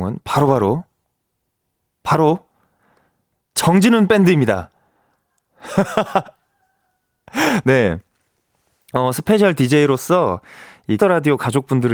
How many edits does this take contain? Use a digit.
1